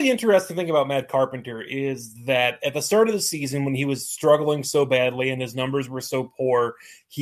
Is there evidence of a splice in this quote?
no; 0 cuts

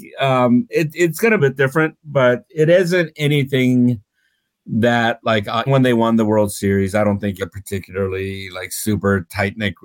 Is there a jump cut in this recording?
yes; 3 cuts; at 1.4 s, 5.7 s, 7.4 s

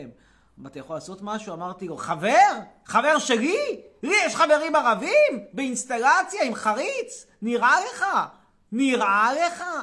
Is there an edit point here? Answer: no; 0 cuts

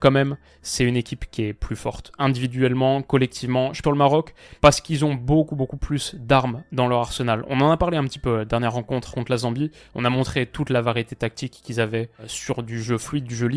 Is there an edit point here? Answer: yes; 1 cut; at 3.8 s

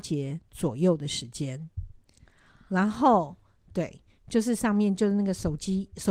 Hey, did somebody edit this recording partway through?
no; 0 cuts

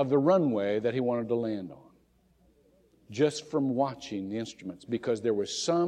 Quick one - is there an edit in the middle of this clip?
no; 0 cuts

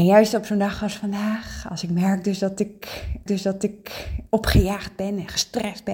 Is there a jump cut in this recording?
yes; 1 cut; at 3.3 s

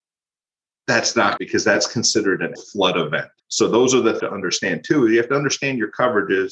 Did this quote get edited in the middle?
yes; 4 cuts; at 1.4 s, 2.6 s, 3.4 s, 4.2 s

